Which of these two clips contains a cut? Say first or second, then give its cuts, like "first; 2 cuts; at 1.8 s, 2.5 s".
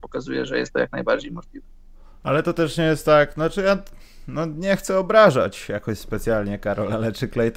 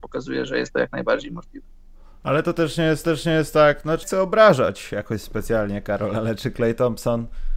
second; 2 cuts; at 3.0 s, 4.0 s